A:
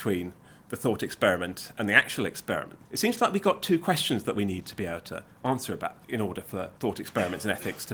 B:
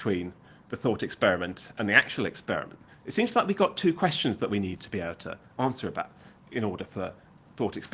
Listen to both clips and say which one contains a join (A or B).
A